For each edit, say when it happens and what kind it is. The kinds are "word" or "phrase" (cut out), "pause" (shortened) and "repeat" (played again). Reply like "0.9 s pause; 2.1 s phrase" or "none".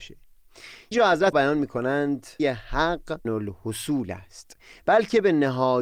0.9 s word; 1.3 s word; 2.4 s word; 3.2 s word